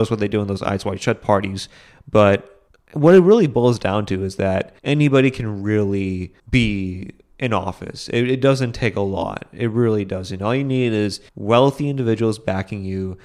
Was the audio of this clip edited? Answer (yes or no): yes